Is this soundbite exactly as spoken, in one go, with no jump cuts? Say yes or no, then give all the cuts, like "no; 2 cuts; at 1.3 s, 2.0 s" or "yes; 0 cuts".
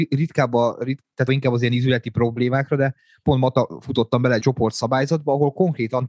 no; 3 cuts; at 1.3 s, 3.2 s, 4.4 s